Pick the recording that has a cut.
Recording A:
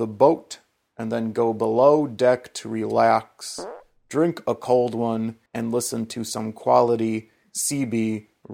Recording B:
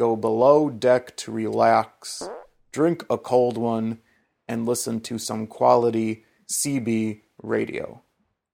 A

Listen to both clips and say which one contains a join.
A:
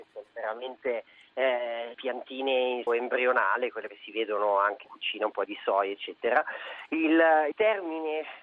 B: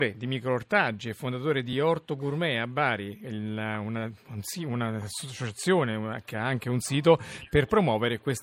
A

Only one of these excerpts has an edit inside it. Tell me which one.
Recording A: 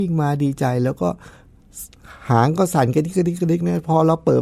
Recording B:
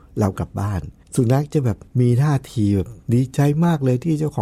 B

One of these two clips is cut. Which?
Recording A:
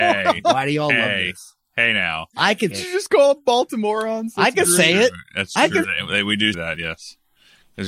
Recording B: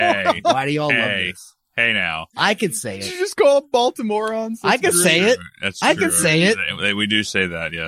A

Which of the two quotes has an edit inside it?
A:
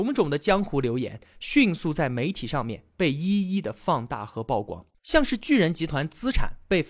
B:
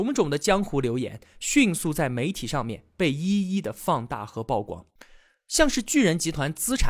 A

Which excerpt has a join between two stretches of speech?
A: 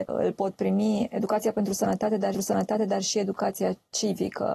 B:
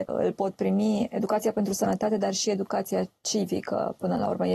A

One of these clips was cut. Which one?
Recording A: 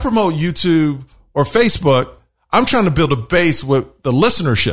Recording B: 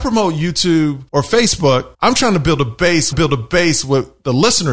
B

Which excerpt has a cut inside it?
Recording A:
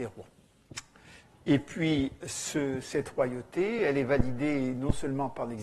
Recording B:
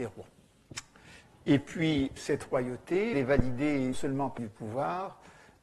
B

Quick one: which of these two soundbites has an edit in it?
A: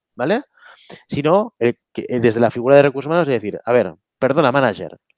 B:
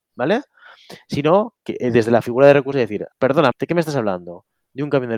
B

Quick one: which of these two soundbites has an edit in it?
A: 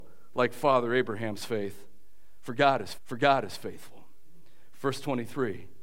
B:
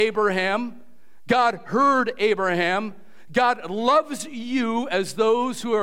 A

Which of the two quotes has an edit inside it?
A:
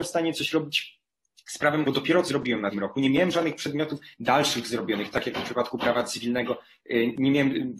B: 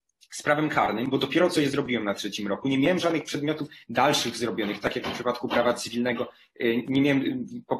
A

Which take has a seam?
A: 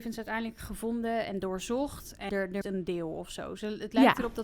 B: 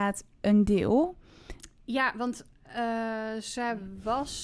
A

